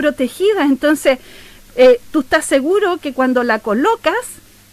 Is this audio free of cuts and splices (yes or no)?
yes